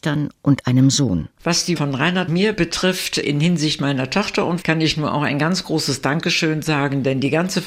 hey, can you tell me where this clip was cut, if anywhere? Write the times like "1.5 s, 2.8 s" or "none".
1.8 s, 2.3 s, 4.6 s